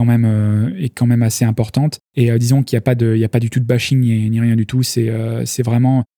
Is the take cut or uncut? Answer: cut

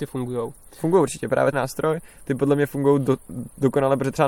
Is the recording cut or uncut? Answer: cut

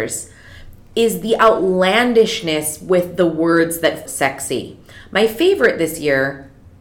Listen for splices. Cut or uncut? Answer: cut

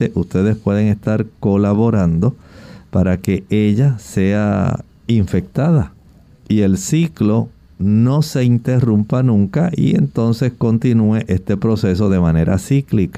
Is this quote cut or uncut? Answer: uncut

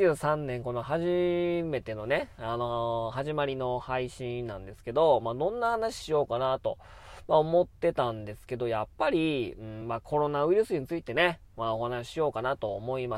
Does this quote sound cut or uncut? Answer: uncut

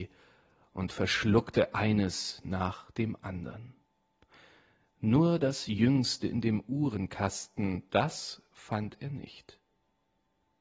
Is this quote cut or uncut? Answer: uncut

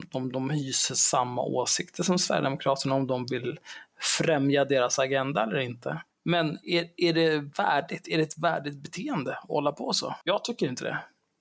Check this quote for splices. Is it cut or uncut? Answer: cut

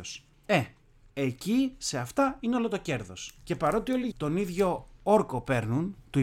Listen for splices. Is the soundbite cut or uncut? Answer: cut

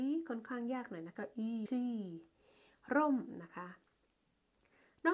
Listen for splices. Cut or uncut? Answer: cut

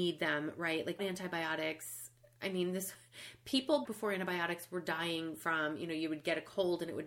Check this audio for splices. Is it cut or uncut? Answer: cut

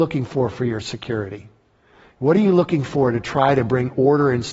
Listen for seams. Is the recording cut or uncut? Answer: uncut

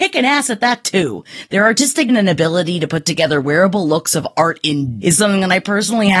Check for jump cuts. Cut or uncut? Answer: cut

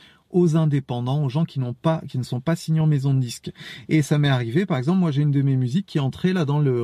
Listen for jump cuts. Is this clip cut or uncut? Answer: uncut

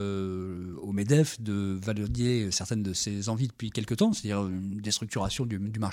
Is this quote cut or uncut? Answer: uncut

